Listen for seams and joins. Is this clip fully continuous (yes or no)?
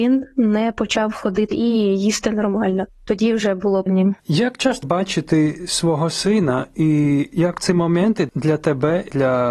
no